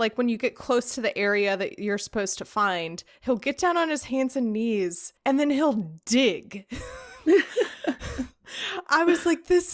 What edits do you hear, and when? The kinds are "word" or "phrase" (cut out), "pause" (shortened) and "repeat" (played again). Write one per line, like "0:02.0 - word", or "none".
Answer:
0:05.2 - pause